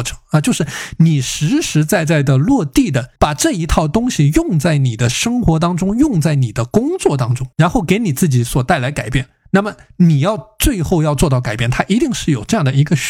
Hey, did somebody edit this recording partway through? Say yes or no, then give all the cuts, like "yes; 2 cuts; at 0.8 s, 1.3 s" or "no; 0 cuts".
yes; 2 cuts; at 3.2 s, 7.5 s